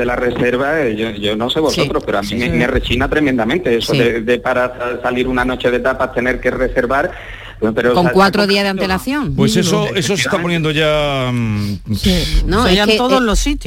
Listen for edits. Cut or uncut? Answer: uncut